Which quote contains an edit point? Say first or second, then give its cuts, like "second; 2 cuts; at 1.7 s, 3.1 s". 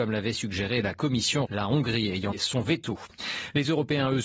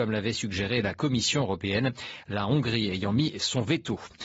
first; 2 cuts; at 1.4 s, 2.3 s